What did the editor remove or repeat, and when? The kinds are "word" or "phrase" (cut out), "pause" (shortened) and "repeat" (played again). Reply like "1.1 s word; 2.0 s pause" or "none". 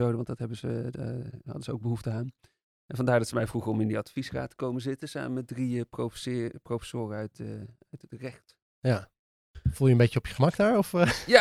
none